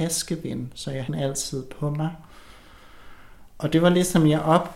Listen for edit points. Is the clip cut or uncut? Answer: cut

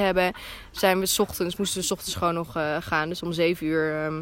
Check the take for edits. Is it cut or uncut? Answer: uncut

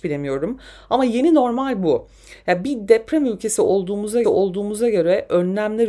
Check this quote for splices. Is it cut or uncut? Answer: cut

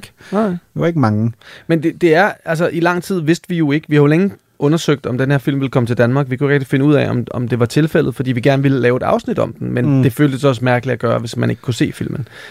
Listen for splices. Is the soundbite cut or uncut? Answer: uncut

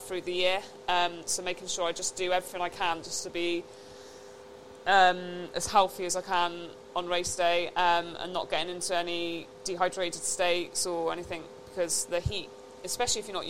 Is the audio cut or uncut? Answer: uncut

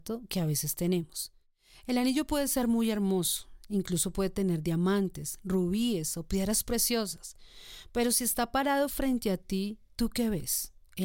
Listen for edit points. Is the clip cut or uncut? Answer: uncut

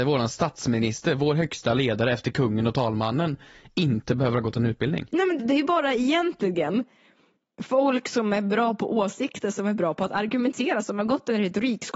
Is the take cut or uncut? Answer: cut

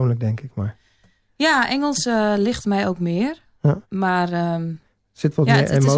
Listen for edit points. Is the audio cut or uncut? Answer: cut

